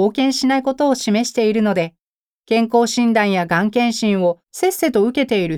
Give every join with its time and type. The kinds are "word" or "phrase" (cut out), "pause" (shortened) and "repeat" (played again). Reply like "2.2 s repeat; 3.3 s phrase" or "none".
2.1 s pause; 4.4 s pause